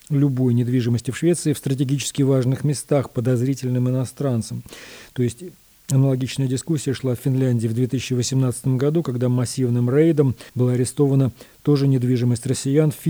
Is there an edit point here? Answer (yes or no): yes